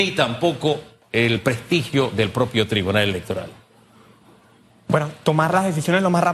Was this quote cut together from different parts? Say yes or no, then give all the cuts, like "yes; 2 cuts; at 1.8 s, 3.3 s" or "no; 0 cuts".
no; 0 cuts